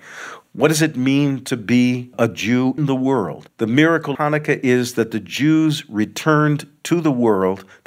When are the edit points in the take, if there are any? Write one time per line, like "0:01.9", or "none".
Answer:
0:02.8
0:04.1